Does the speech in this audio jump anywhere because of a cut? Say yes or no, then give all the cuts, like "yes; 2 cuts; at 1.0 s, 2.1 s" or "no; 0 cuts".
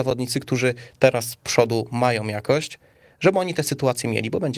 no; 0 cuts